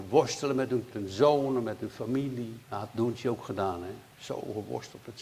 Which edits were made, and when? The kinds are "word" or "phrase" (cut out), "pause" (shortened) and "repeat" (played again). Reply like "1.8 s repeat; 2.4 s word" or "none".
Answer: 0.9 s phrase; 2.6 s pause